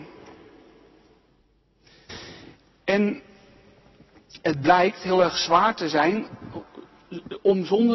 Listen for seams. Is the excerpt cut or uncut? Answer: uncut